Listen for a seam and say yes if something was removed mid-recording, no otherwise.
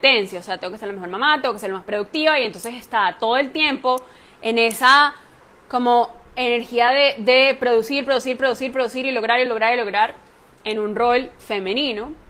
no